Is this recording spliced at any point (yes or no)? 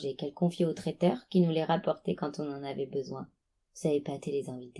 no